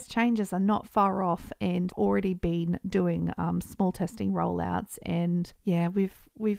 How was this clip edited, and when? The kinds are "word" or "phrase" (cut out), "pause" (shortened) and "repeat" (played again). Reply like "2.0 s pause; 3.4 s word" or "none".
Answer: 1.9 s word; 5.6 s pause